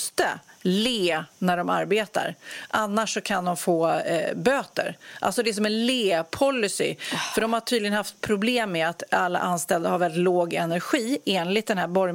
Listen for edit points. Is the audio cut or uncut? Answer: uncut